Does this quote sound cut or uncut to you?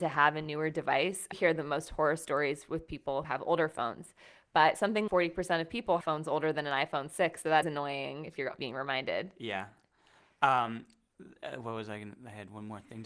cut